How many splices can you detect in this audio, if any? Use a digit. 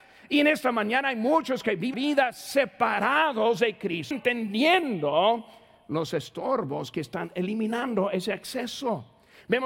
2